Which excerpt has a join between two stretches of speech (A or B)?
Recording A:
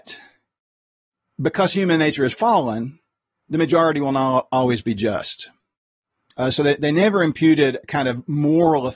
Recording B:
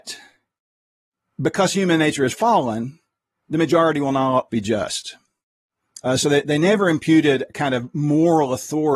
B